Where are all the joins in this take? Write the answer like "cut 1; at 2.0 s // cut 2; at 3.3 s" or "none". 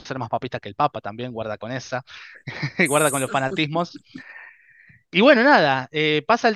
none